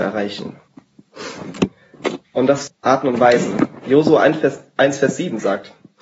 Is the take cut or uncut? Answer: cut